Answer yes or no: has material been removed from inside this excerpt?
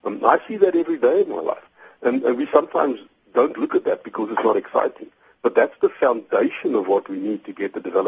no